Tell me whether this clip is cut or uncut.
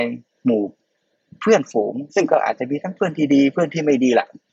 cut